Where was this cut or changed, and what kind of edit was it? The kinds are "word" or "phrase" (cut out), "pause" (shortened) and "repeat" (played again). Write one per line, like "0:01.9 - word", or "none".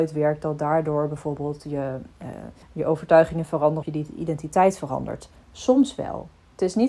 0:02.6 - pause
0:03.8 - word